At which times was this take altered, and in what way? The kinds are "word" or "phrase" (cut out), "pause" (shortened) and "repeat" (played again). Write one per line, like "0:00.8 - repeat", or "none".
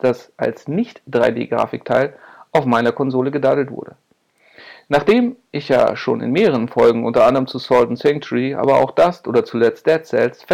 none